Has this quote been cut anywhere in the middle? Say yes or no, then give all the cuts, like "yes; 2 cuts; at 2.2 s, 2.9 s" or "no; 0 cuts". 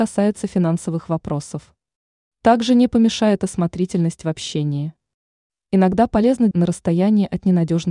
yes; 1 cut; at 6.5 s